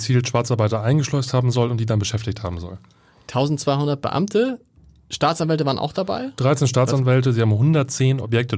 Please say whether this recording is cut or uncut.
uncut